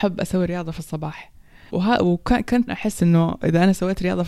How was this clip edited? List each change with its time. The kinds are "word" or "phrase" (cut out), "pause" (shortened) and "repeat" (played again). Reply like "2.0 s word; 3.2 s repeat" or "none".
1.7 s word; 2.7 s word